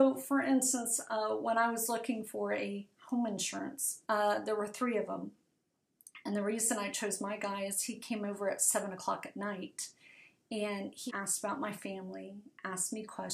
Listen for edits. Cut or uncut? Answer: cut